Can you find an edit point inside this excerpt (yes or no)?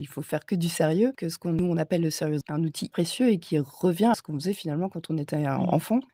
yes